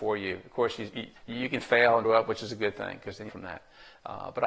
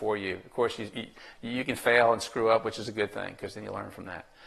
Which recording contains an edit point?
first; 3 cuts; at 1.2 s, 2.0 s, 3.3 s

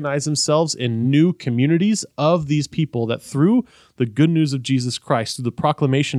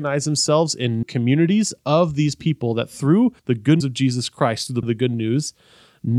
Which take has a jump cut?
second; 4 cuts; at 1.0 s, 3.4 s, 3.8 s, 4.8 s

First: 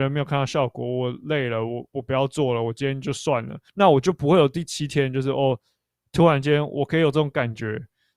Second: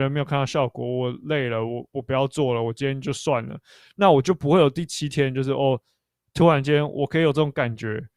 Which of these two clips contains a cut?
first; 1 cut; at 3.7 s

